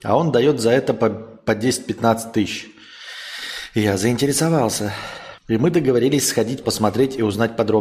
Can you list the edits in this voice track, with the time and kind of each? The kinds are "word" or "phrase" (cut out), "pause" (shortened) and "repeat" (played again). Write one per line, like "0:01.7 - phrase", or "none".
0:05.4 - pause
0:06.6 - word